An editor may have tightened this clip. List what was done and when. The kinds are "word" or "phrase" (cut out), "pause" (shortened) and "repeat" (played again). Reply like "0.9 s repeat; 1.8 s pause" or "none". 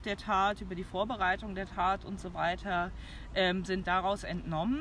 none

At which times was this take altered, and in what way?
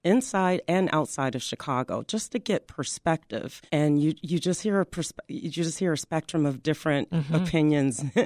3.7 s pause

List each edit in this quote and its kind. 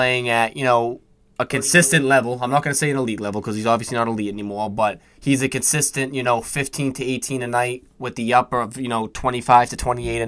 none

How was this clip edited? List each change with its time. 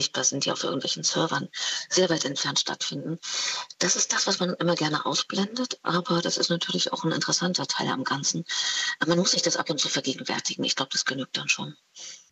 none

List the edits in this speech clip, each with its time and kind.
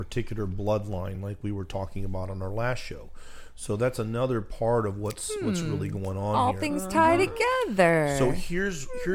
none

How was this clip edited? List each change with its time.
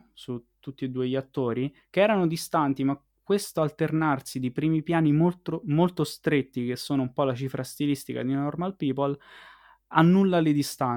none

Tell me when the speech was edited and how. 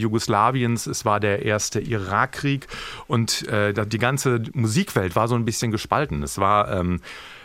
none

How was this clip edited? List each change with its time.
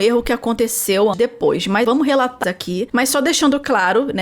1.1 s word; 1.8 s word; 2.4 s word

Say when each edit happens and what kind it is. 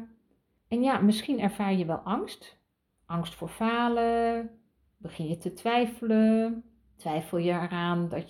none

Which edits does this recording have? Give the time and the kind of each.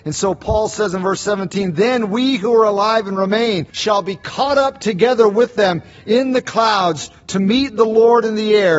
3.7 s pause

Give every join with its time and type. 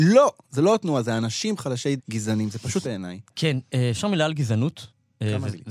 2.0 s word; 2.8 s word

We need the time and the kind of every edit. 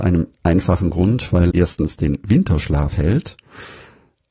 1.5 s word

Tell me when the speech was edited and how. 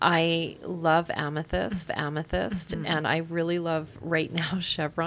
1.9 s repeat

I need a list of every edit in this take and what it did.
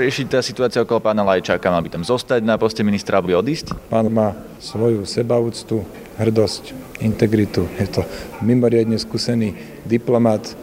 3.3 s word; 4.1 s word

